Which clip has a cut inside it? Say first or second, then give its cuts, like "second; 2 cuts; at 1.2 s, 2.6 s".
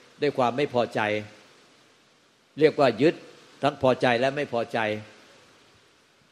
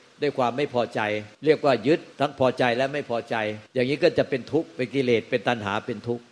second; 3 cuts; at 1.3 s, 2.1 s, 3.7 s